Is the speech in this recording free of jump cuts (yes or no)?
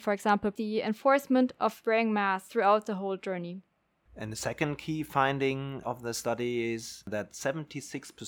no